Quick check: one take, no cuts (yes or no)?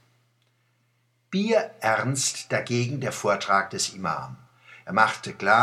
yes